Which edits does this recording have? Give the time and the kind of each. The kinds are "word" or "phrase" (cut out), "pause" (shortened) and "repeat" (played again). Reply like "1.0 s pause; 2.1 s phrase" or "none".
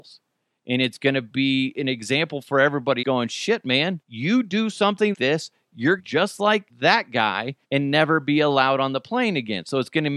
3.0 s word; 4.0 s pause; 5.1 s word; 6.0 s phrase; 6.7 s pause; 7.6 s pause